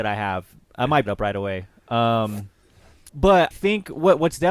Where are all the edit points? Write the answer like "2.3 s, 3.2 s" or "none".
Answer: 1.1 s, 3.5 s